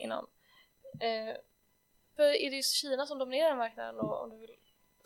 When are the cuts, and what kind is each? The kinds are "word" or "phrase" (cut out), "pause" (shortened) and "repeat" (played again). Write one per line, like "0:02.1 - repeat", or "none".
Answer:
0:02.2 - word